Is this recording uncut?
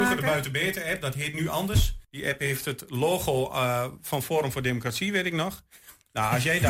no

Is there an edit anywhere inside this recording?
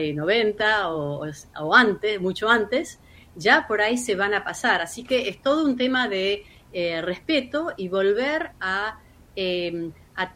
no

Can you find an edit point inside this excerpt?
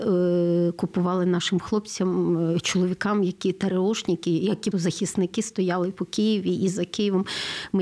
yes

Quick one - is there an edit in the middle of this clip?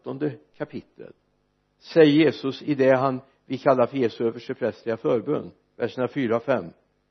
no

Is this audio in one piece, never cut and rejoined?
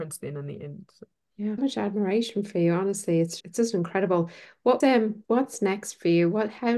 no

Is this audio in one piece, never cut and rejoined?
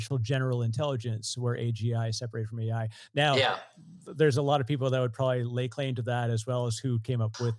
yes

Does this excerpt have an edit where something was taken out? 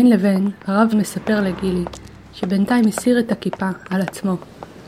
yes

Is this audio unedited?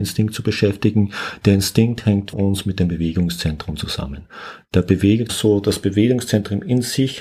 no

